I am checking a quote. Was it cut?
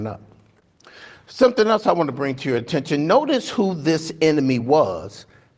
no; 0 cuts

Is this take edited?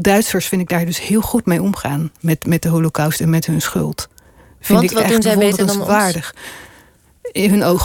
no; 0 cuts

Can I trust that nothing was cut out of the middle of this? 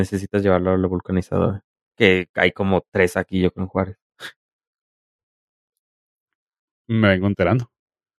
yes; 0 cuts

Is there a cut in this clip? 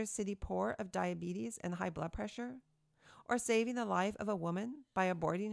no; 0 cuts

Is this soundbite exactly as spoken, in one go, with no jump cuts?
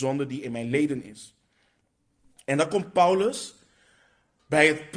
yes; 0 cuts

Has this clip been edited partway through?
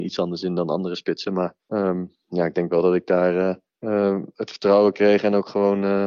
yes; 2 cuts; at 1.6 s, 3.7 s

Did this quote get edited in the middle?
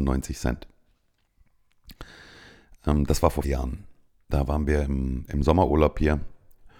yes; 3 cuts; at 3.4 s, 4.1 s, 5.3 s

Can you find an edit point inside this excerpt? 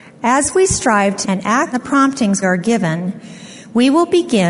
yes; 3 cuts; at 1.2 s, 1.7 s, 2.4 s

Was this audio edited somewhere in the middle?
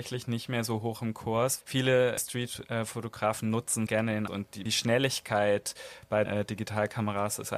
yes; 6 cuts; at 1.6 s, 2.2 s, 3.9 s, 4.3 s, 4.7 s, 6.3 s

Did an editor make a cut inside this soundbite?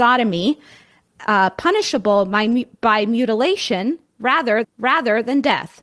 yes; 1 cut; at 4.6 s

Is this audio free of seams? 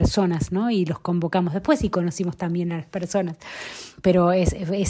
no; 1 cut; at 4.0 s

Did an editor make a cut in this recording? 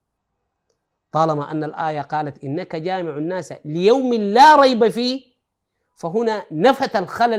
no; 0 cuts

